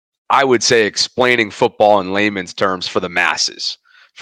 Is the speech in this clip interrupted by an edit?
no; 0 cuts

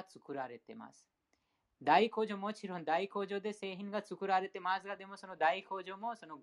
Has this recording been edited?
no; 0 cuts

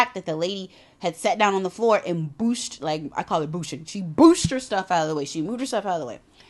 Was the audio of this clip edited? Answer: no; 0 cuts

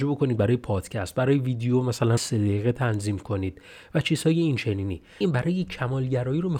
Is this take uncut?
no; 2 cuts; at 2.2 s, 5.2 s

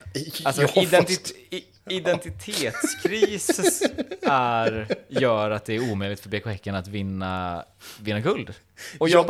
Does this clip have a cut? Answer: no; 0 cuts

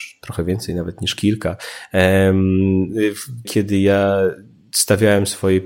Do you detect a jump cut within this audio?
yes; 1 cut; at 3.4 s

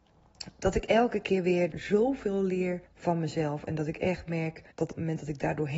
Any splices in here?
yes; 3 cuts; at 1.7 s, 2.9 s, 4.7 s

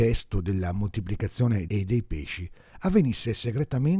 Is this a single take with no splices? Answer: no; 1 cut; at 1.7 s

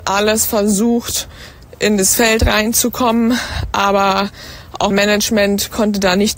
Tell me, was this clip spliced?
yes; 1 cut; at 4.9 s

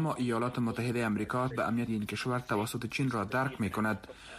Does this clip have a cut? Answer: yes; 2 cuts; at 1.5 s, 1.9 s

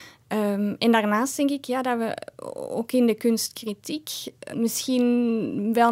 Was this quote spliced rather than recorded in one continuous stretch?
yes; 1 cut; at 4.5 s

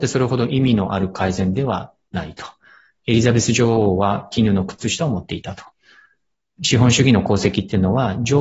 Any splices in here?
no; 0 cuts

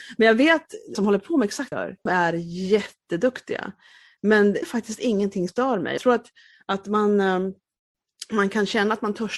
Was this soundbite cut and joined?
yes; 6 cuts; at 0.9 s, 1.7 s, 2.1 s, 4.6 s, 5.5 s, 6.0 s

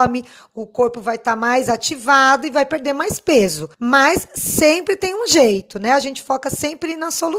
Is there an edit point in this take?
yes; 1 cut; at 3.7 s

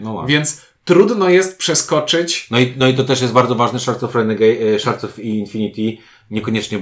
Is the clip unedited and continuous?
yes; 0 cuts

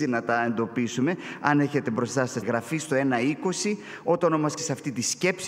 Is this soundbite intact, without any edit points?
no; 2 cuts; at 2.4 s, 4.6 s

